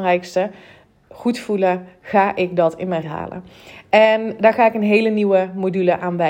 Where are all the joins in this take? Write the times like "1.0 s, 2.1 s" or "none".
3.0 s